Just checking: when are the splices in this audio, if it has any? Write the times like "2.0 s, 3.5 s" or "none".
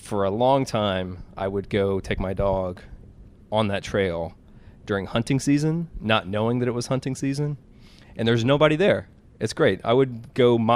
none